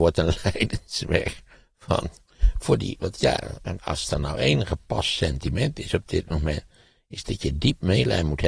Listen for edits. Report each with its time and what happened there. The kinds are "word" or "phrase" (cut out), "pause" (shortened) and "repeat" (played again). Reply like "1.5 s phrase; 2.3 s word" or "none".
3.8 s word

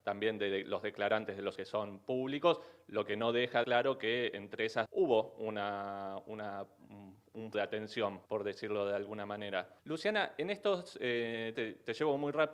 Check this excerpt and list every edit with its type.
1.6 s word; 3.6 s phrase; 4.9 s phrase; 7.5 s word; 8.3 s pause; 9.8 s pause; 11.5 s word

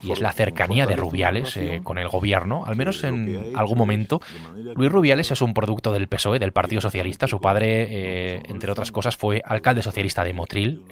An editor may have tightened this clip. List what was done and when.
none

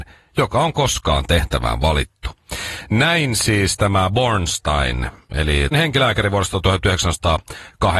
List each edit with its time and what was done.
5.7 s word

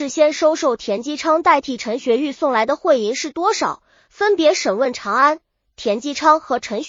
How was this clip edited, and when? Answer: none

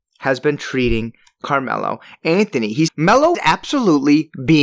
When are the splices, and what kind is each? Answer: 2.9 s word; 3.3 s word

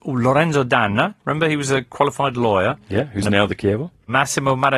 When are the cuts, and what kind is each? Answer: 3.6 s phrase

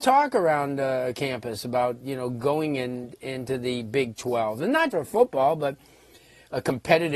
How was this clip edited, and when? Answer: 4.9 s word

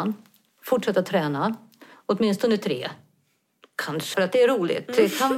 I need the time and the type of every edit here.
4.1 s word

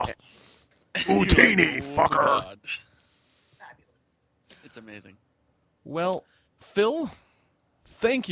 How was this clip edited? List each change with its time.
none

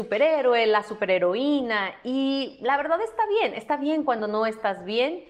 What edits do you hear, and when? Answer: none

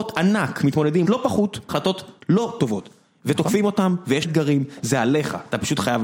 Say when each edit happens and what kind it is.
1.0 s word; 1.7 s word; 2.6 s word; 4.2 s word

